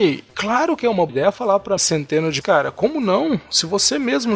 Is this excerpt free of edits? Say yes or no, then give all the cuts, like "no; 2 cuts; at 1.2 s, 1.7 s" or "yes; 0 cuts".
no; 3 cuts; at 1.1 s, 1.8 s, 2.4 s